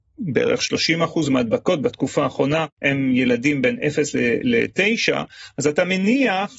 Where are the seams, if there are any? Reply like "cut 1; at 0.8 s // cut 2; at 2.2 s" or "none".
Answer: none